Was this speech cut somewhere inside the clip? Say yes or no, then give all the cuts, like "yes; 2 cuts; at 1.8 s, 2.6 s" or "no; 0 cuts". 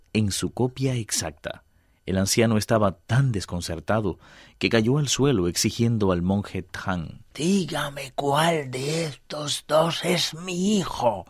no; 0 cuts